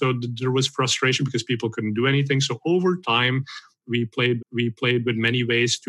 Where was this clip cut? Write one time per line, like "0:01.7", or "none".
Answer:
0:04.4